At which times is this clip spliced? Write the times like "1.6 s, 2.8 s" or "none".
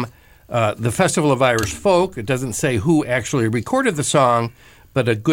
none